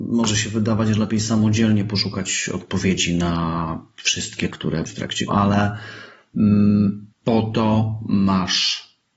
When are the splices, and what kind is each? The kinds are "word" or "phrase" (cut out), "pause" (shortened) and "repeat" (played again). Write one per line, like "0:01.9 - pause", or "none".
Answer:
0:04.5 - word
0:04.9 - phrase
0:05.3 - word
0:07.1 - pause